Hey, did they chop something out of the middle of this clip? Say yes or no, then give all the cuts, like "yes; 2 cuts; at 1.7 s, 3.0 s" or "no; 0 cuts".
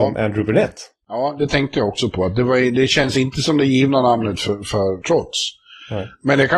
no; 0 cuts